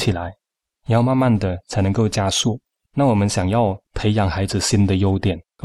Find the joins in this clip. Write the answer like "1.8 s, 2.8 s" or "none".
none